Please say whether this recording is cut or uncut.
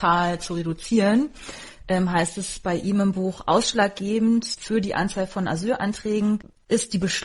uncut